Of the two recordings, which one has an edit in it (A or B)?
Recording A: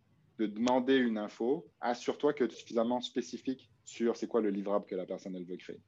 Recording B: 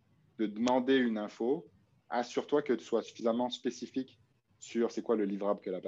A